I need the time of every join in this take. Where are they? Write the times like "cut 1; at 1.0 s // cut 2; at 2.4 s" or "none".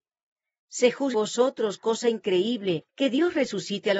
cut 1; at 1.1 s // cut 2; at 2.9 s